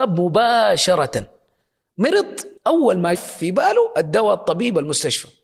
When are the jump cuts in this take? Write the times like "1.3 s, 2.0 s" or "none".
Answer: 2.6 s, 3.2 s